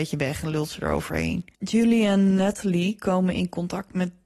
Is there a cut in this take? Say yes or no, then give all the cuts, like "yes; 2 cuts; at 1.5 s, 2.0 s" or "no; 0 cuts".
yes; 1 cut; at 1.5 s